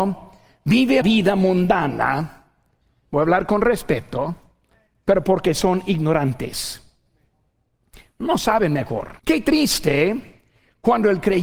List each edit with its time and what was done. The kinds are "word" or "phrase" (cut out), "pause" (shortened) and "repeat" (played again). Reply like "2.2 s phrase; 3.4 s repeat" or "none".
1.0 s word; 9.2 s pause